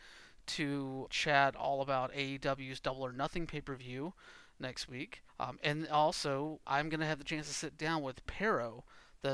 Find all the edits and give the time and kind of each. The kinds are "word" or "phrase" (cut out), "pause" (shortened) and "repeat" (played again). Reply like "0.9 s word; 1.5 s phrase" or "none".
1.1 s word; 5.3 s pause; 6.7 s word